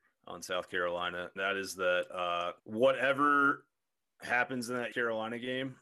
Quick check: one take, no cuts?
no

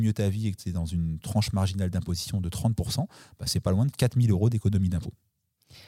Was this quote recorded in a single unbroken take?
yes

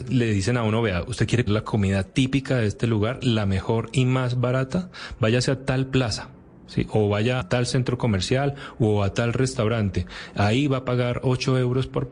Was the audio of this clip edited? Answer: yes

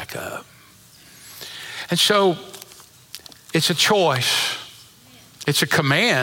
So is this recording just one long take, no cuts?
yes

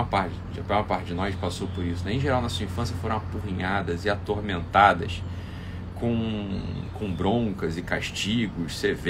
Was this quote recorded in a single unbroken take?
yes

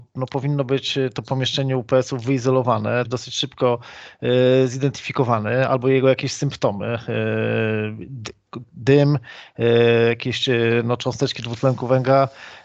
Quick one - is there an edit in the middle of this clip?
yes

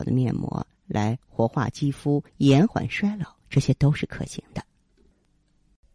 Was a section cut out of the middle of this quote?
yes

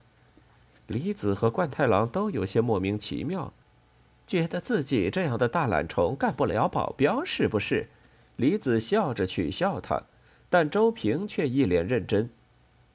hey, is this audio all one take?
yes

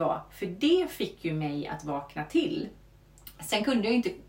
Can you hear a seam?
no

